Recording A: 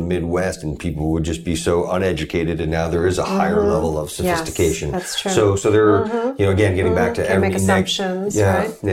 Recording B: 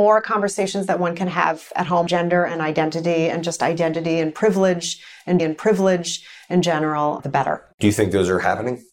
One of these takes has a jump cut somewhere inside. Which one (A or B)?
B